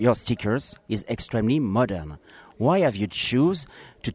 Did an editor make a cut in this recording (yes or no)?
no